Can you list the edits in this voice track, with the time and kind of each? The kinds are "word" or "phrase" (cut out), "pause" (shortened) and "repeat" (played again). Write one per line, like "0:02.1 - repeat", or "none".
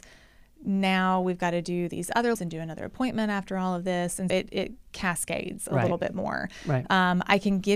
0:02.3 - word
0:04.3 - word